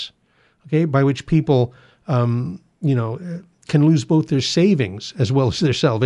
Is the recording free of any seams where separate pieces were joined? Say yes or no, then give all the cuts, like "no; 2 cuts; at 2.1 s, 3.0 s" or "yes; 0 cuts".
yes; 0 cuts